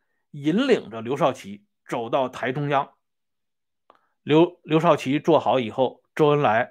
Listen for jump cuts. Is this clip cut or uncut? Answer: uncut